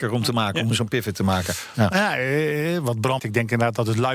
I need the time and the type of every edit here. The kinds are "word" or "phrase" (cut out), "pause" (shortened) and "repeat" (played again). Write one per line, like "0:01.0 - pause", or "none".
0:03.2 - word